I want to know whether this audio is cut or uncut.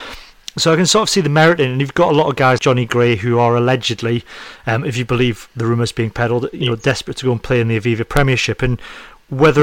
cut